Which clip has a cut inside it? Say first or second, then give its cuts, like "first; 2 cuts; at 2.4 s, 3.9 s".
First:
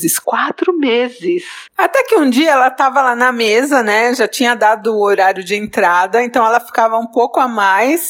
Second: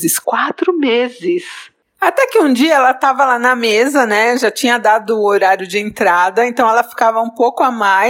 first; 1 cut; at 1.7 s